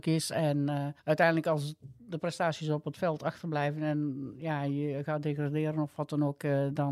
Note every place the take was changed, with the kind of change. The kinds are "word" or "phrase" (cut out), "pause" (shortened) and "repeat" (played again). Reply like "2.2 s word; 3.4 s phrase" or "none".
1.0 s pause